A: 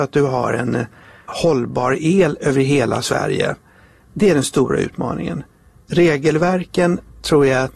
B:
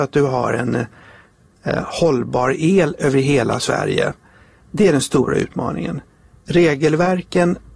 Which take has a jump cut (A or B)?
A